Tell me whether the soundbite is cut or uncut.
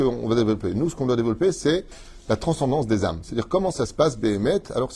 uncut